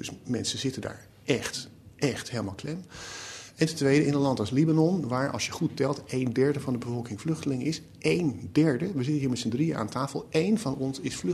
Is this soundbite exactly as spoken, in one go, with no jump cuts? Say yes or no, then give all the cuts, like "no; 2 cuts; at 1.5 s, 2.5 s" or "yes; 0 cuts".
yes; 0 cuts